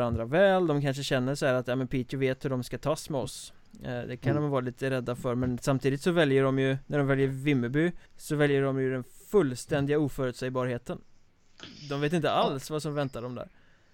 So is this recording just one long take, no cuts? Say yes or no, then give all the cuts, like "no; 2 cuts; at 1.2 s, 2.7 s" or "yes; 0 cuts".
no; 1 cut; at 8.1 s